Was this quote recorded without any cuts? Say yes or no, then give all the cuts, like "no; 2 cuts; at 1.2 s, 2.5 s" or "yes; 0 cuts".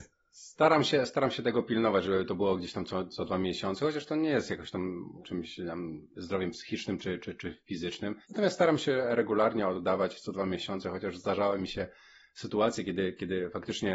no; 2 cuts; at 5.2 s, 8.2 s